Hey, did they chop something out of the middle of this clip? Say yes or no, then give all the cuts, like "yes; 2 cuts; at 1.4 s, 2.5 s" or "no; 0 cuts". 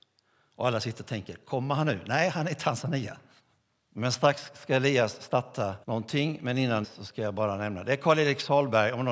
yes; 3 cuts; at 3.4 s, 5.8 s, 6.8 s